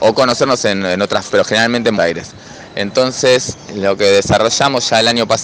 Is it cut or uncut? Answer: cut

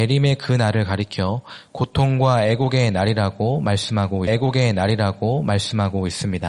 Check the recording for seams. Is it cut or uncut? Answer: cut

